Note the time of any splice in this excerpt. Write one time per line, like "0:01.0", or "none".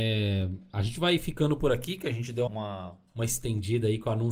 0:02.5